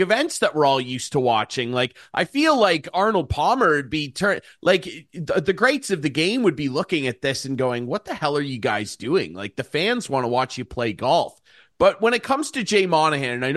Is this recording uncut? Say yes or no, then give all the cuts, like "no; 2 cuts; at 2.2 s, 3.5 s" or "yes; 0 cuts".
yes; 0 cuts